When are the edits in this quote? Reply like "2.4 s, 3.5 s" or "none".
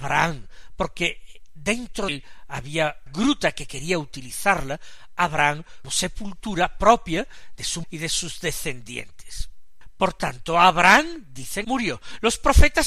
2.1 s, 3.1 s, 5.8 s, 7.8 s, 11.6 s